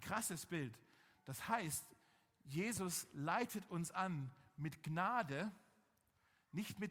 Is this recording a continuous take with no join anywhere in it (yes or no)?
yes